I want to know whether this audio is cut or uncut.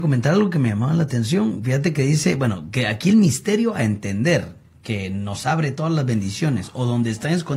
uncut